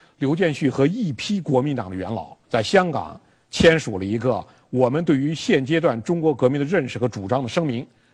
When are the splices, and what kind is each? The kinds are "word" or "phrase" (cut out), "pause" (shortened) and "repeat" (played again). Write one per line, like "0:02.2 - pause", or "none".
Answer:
0:02.4 - pause